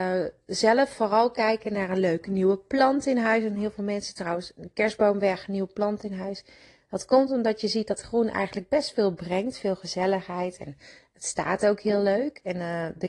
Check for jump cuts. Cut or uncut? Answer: uncut